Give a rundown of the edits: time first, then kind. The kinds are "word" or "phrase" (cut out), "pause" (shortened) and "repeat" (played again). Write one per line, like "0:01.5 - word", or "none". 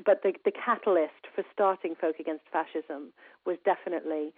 none